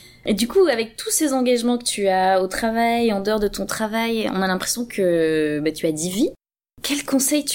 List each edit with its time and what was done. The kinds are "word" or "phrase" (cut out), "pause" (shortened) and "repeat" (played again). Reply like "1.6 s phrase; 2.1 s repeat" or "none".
none